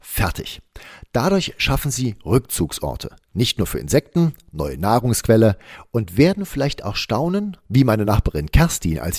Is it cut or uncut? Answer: uncut